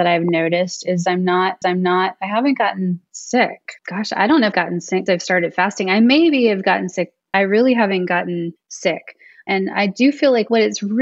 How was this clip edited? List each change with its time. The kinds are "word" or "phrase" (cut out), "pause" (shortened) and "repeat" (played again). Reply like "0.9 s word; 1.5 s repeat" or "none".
1.6 s repeat; 3.8 s pause; 4.5 s word; 5.1 s word; 7.3 s phrase; 8.6 s pause